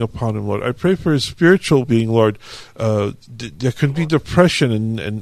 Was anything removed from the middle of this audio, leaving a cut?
yes; 1 cut; at 1.8 s

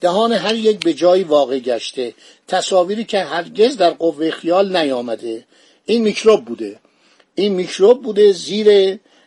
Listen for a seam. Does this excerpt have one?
no; 0 cuts

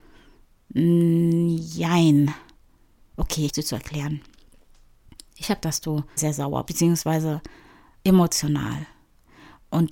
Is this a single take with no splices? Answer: no; 4 cuts; at 3.5 s, 5.6 s, 6.2 s, 6.7 s

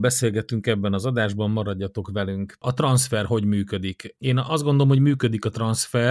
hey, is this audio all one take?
yes; 0 cuts

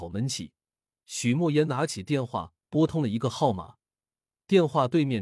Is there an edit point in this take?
no; 0 cuts

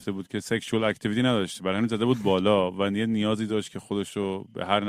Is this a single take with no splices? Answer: yes; 0 cuts

